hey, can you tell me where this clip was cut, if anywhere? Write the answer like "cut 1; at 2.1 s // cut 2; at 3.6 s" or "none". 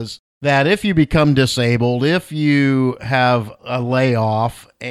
cut 1; at 3.6 s

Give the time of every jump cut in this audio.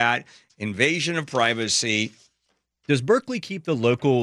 none

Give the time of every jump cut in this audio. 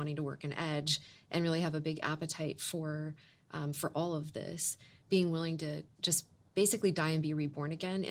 none

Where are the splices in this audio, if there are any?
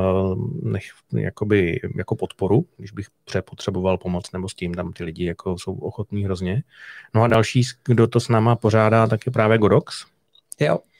none

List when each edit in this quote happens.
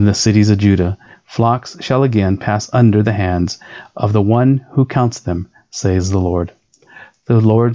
none

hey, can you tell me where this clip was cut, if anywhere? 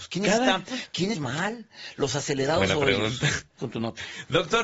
cut 1; at 1.1 s // cut 2; at 3.6 s

